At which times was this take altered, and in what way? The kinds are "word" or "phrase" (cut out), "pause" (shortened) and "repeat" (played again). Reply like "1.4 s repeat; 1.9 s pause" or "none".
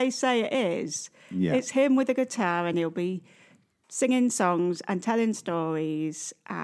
none